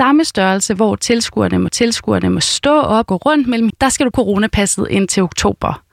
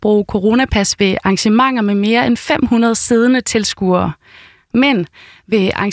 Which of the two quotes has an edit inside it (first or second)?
first